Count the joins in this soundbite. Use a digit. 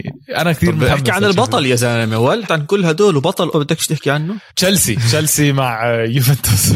3